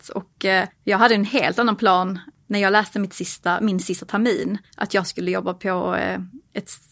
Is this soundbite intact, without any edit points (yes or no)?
yes